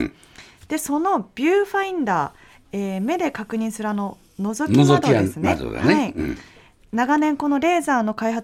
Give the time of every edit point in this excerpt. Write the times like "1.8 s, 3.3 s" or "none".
none